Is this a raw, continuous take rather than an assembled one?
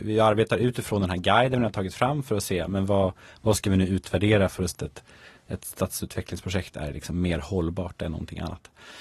no; 1 cut; at 4.7 s

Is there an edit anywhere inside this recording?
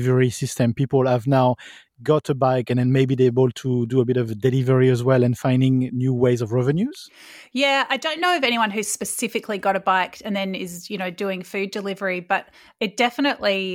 no; 0 cuts

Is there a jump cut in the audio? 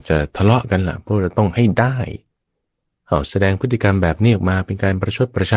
no; 0 cuts

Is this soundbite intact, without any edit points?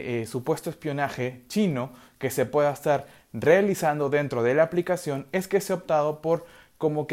yes; 0 cuts

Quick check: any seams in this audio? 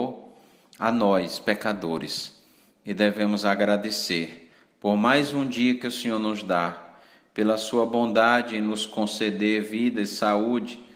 no; 0 cuts

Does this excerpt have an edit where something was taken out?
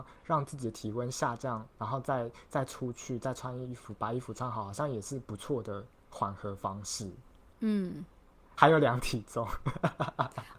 no; 0 cuts

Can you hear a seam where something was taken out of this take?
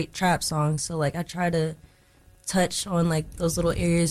no; 0 cuts

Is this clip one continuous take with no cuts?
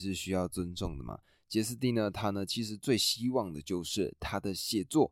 yes; 0 cuts

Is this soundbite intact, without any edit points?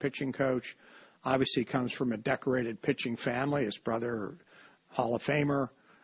yes; 0 cuts

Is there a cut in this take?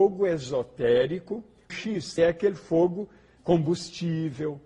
yes; 3 cuts; at 1.7 s, 2.2 s, 3.4 s

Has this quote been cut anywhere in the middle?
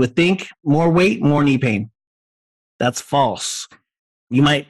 no; 0 cuts

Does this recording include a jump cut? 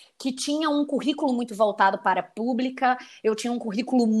no; 0 cuts

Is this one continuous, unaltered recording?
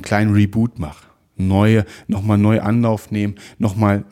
yes; 0 cuts

